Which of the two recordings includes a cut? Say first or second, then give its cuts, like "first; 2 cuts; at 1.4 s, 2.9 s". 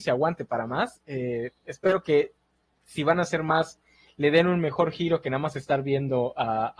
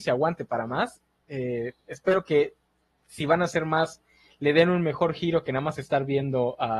first; 1 cut; at 1.0 s